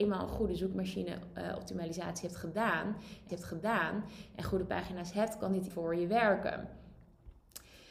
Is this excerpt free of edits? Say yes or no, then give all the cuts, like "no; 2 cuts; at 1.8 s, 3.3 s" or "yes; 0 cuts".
no; 2 cuts; at 3.3 s, 5.7 s